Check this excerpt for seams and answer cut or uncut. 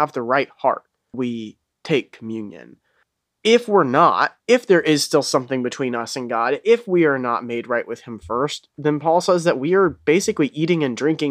cut